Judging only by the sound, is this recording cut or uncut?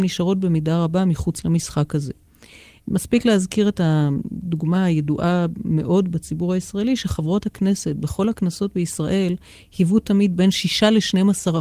uncut